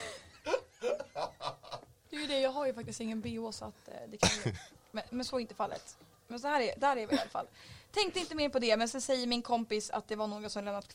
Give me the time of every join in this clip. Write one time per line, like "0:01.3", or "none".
none